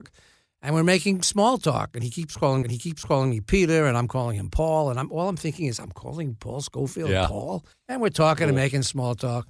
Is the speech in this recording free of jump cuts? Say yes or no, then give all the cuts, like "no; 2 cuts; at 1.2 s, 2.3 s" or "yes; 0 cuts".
no; 2 cuts; at 2.6 s, 7.7 s